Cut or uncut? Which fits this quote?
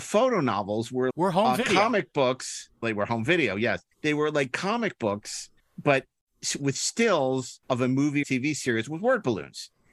cut